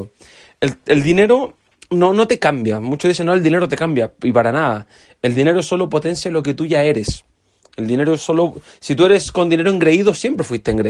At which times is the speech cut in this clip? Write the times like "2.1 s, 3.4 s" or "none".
none